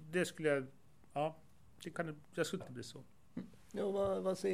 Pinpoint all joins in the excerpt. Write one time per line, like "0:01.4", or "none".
0:01.9
0:02.6